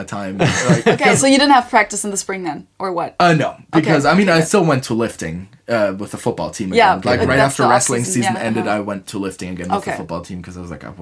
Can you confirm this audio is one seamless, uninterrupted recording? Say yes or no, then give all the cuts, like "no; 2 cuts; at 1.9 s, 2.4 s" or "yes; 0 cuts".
yes; 0 cuts